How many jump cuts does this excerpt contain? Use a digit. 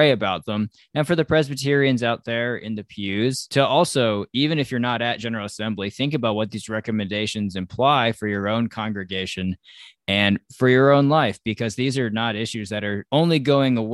0